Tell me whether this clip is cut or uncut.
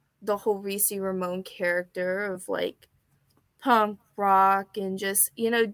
uncut